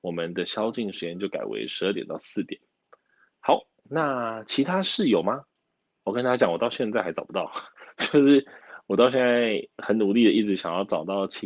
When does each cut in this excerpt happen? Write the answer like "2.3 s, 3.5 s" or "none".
none